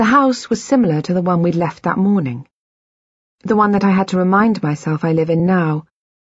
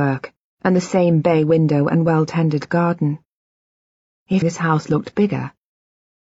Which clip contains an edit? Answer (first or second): second